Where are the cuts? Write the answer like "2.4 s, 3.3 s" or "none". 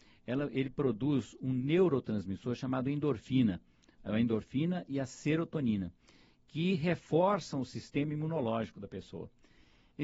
none